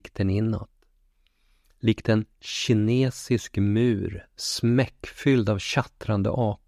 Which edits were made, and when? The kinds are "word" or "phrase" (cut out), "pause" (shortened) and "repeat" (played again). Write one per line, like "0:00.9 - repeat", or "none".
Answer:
none